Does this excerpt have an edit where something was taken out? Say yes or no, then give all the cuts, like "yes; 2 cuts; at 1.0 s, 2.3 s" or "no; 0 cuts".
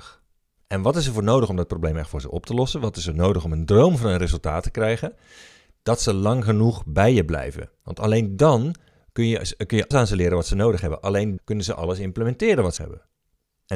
yes; 3 cuts; at 9.9 s, 11.4 s, 12.8 s